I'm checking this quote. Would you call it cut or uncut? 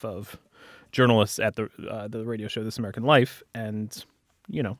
uncut